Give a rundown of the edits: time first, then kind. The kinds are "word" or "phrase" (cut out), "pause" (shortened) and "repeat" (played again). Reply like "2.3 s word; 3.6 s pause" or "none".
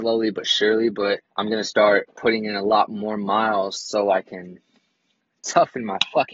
1.3 s pause